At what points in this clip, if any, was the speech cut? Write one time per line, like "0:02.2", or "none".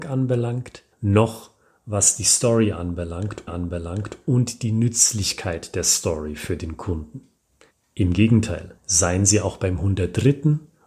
0:00.9
0:03.5
0:08.8